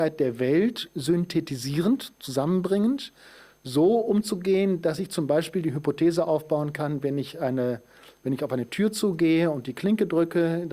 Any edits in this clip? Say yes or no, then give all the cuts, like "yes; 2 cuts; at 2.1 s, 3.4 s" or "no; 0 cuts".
no; 0 cuts